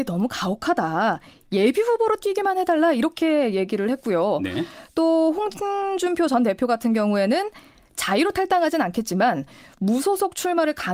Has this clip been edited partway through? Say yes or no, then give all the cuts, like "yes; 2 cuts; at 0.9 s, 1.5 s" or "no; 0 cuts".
no; 0 cuts